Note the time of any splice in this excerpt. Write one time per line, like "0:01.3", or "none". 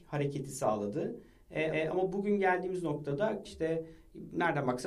0:01.7
0:03.5

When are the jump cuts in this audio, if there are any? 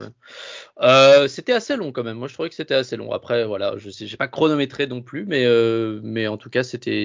none

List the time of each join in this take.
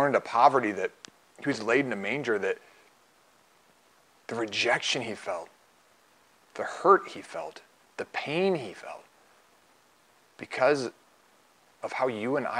none

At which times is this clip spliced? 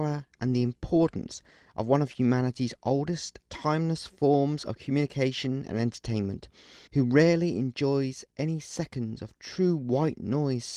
0:03.4
0:06.9

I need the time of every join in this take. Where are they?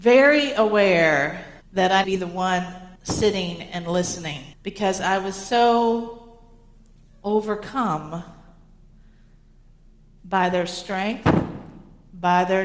0:01.6
0:02.0
0:03.0
0:04.5

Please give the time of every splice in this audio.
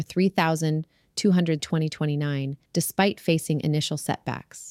0:01.6
0:02.7

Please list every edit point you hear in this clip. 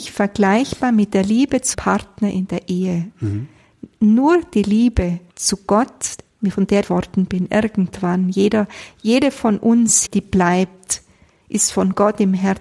0:01.7
0:03.9
0:05.3
0:06.8
0:10.1

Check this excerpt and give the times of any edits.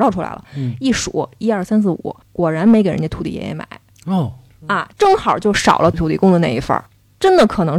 0:02.2
0:03.9

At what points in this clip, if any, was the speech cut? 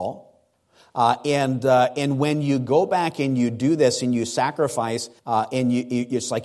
0:05.2

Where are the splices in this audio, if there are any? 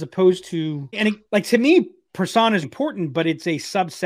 0:00.9
0:01.2
0:02.6

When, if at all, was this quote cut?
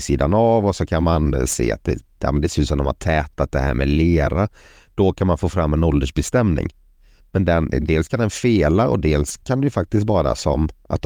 none

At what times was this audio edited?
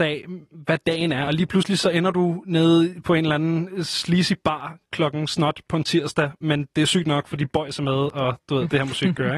none

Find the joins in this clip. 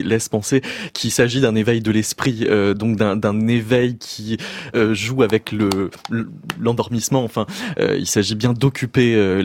none

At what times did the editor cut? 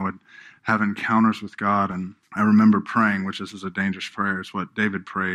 0:02.2

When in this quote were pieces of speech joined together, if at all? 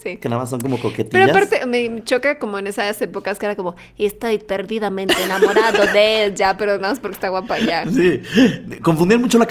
none

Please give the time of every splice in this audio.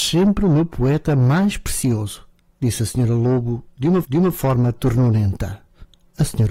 0:04.0

